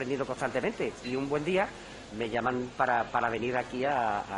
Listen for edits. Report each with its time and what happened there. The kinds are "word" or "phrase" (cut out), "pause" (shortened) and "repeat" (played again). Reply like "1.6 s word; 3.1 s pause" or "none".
2.1 s word